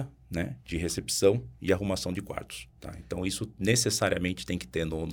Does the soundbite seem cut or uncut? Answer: cut